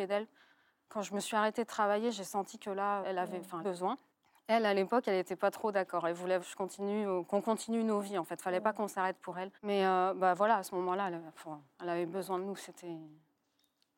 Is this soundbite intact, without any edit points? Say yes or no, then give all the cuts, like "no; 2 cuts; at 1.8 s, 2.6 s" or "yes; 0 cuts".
no; 5 cuts; at 3.0 s, 3.6 s, 4.1 s, 6.4 s, 9.6 s